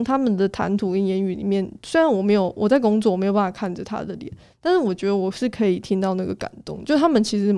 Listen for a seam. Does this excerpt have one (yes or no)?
no